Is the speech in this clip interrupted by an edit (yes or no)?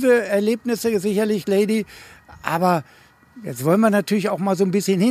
yes